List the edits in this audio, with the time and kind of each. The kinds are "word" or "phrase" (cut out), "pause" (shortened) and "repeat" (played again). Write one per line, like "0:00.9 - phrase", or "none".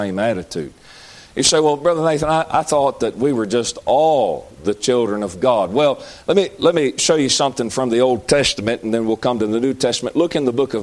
none